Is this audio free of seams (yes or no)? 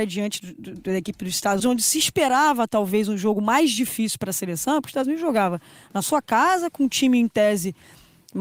no